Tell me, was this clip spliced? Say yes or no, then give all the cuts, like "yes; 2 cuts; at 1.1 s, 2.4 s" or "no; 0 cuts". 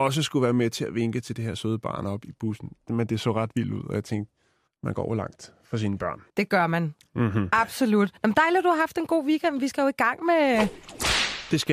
yes; 3 cuts; at 4.7 s, 6.3 s, 8.2 s